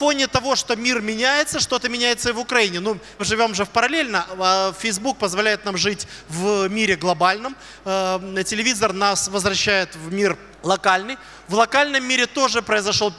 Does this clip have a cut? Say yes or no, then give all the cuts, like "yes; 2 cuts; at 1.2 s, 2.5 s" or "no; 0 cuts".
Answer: yes; 2 cuts; at 3.2 s, 10.5 s